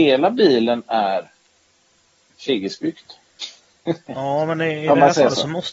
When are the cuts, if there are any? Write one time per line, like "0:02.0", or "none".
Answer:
none